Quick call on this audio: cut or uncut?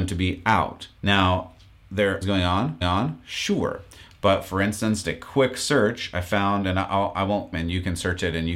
cut